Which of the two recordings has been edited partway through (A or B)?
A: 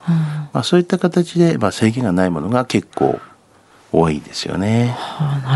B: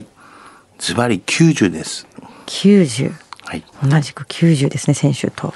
B